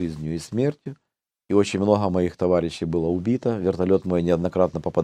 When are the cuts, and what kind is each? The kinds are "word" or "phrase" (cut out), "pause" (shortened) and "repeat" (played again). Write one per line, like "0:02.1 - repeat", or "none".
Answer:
none